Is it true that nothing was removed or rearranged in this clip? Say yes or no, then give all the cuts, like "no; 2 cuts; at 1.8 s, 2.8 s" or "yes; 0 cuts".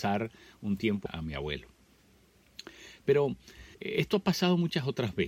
no; 2 cuts; at 1.1 s, 3.7 s